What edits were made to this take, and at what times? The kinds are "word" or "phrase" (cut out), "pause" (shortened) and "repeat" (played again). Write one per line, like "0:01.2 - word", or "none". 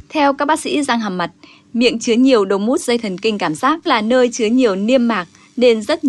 0:03.9 - word